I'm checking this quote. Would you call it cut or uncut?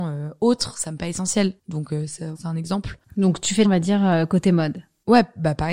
cut